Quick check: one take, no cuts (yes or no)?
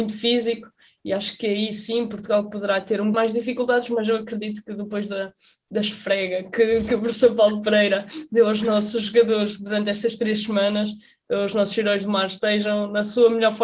no